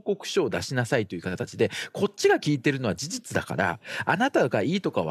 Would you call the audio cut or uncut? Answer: uncut